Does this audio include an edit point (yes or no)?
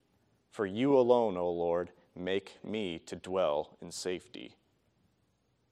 no